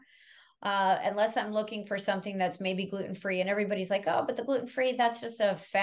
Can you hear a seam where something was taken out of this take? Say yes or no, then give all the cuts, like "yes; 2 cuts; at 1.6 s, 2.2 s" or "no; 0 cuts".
no; 0 cuts